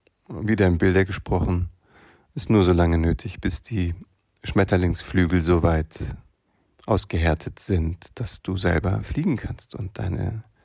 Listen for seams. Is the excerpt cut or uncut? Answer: uncut